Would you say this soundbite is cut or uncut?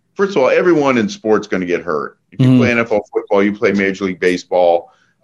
uncut